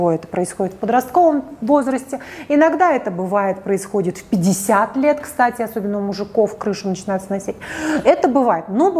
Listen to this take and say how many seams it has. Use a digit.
0